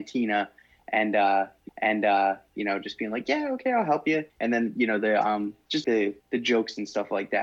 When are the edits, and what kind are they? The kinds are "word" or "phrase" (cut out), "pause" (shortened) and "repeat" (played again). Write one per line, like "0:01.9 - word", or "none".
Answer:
0:01.7 - repeat
0:04.3 - pause
0:05.8 - word
0:06.2 - pause